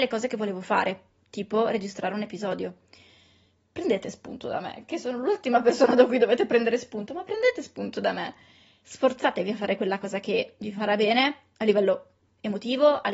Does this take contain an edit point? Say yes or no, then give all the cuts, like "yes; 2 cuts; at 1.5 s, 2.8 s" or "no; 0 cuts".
no; 0 cuts